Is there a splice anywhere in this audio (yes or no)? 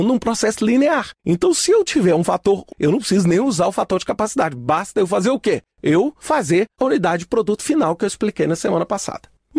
yes